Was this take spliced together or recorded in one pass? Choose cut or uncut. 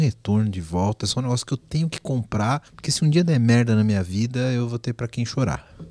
cut